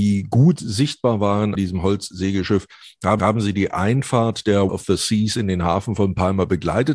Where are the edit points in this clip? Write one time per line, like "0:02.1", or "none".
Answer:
0:01.5
0:03.2
0:04.7